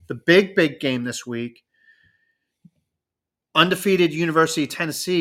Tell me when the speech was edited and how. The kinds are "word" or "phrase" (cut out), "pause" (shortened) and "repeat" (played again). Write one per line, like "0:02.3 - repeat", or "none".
none